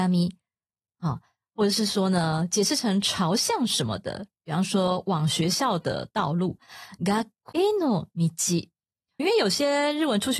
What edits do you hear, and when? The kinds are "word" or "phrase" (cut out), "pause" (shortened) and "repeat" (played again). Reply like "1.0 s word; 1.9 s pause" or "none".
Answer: 7.5 s word; 9.2 s word